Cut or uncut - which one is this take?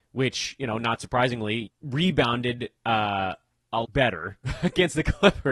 cut